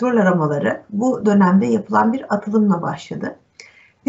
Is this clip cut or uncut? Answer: uncut